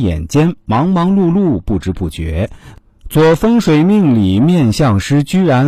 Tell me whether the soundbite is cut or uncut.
uncut